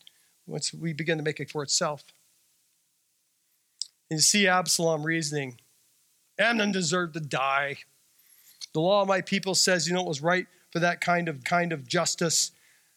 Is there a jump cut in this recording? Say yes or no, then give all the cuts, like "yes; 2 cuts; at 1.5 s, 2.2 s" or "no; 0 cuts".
yes; 2 cuts; at 1.5 s, 11.4 s